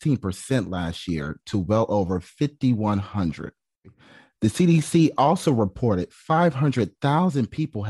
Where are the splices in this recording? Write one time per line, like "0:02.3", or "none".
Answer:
none